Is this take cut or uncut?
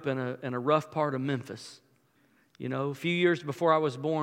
uncut